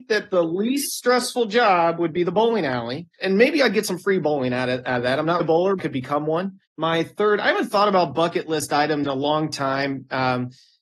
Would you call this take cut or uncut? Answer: cut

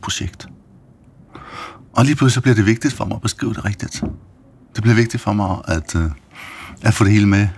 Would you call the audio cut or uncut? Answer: uncut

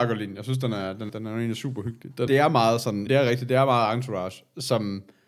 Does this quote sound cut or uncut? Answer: cut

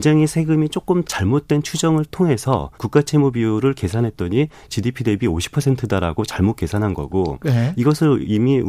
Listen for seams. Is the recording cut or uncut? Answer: cut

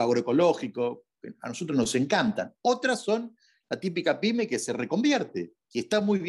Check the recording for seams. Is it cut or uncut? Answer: uncut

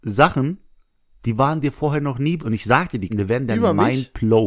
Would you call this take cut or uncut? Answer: cut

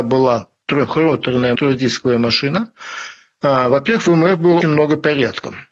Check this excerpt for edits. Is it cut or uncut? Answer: cut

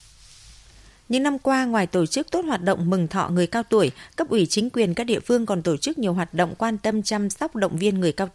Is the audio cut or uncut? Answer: uncut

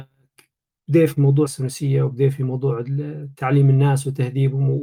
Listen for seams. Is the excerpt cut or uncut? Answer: cut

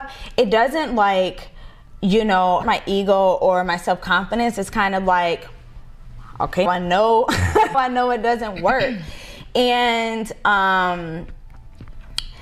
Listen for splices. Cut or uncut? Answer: cut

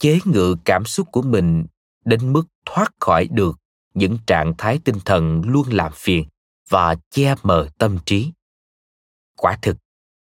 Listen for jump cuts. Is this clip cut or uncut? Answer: uncut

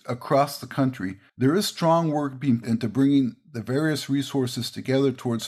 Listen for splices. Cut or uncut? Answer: cut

